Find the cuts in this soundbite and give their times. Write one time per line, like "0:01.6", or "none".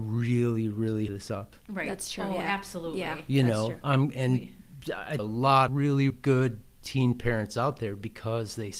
0:01.1
0:05.2
0:05.7
0:06.1